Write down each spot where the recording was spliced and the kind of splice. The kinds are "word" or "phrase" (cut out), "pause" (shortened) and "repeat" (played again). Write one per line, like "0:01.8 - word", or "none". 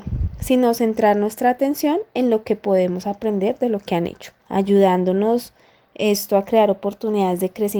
0:04.4 - pause